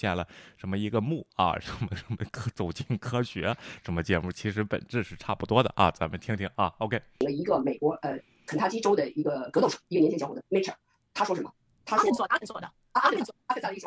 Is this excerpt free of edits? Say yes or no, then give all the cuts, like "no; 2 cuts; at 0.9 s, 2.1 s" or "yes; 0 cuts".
no; 1 cut; at 10.4 s